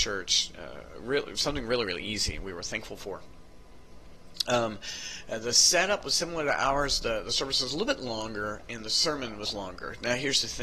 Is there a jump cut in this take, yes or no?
no